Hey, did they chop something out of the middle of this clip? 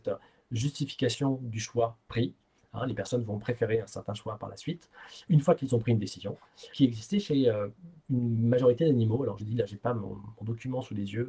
yes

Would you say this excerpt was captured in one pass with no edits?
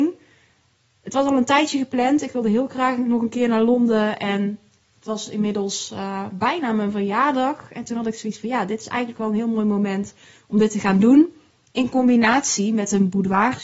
yes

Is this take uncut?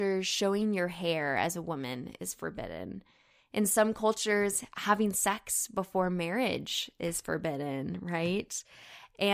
yes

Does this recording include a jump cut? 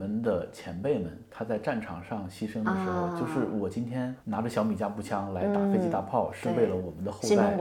yes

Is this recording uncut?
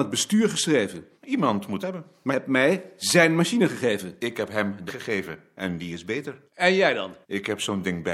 no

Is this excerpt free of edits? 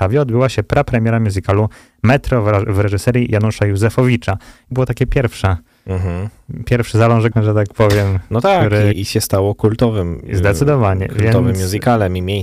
no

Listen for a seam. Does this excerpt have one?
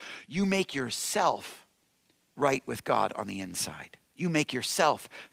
no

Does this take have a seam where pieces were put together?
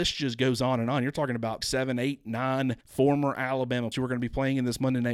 yes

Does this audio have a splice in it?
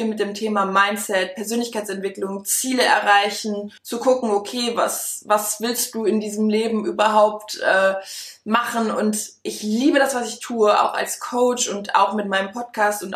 yes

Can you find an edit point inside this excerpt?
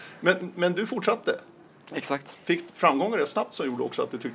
yes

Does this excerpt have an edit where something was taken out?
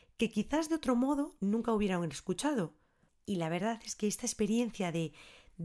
yes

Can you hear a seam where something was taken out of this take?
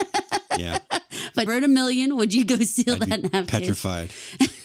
yes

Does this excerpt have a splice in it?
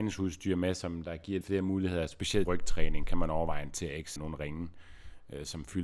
yes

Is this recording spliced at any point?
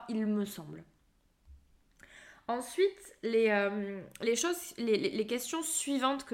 no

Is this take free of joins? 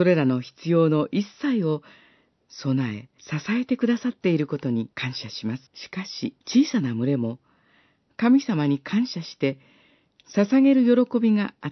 no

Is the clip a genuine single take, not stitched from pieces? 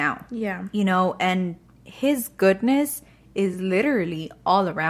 yes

